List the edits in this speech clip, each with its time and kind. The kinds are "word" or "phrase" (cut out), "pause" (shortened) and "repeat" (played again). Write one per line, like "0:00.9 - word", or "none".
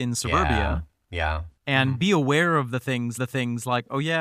0:01.6 - pause
0:03.2 - repeat